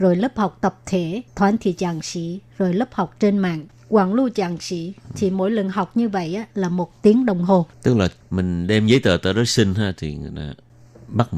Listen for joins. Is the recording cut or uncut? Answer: cut